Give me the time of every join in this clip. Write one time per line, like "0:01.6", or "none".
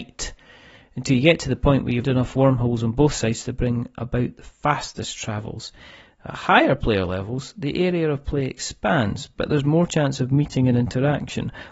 0:02.0